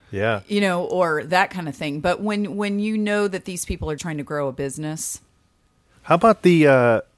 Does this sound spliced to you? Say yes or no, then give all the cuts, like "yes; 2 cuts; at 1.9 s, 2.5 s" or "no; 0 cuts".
yes; 1 cut; at 4.0 s